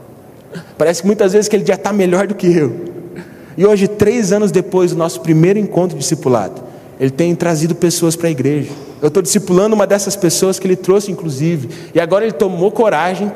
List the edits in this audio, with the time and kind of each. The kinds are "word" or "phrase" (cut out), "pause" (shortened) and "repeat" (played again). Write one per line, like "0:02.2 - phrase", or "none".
none